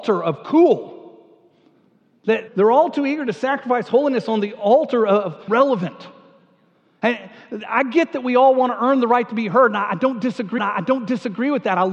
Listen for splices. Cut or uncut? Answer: cut